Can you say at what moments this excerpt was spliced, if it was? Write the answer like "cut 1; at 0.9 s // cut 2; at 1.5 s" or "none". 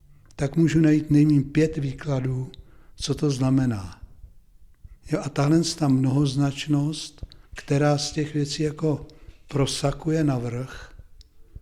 cut 1; at 7.5 s